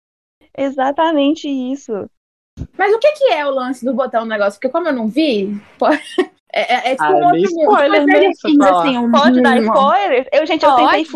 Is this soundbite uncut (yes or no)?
no